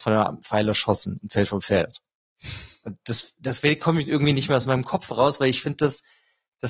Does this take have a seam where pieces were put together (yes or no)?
no